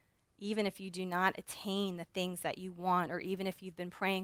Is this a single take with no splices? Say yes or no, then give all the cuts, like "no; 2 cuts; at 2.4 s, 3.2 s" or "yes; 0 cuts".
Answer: yes; 0 cuts